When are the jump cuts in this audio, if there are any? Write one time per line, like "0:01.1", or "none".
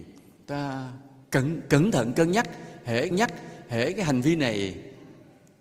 0:01.2
0:03.1